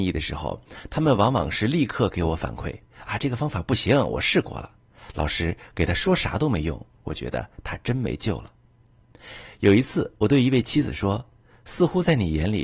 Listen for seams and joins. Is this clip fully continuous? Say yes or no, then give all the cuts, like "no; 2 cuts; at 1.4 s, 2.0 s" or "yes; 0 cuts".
yes; 0 cuts